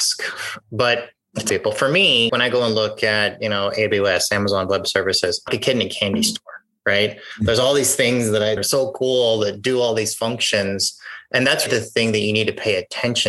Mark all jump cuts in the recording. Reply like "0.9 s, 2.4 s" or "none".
1.5 s, 2.3 s, 5.5 s, 8.6 s, 11.7 s